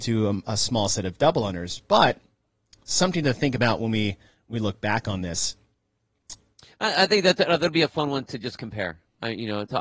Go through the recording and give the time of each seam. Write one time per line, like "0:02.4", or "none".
none